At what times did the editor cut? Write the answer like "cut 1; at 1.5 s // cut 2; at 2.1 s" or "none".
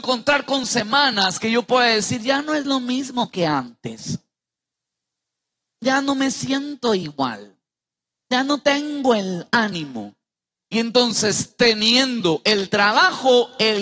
none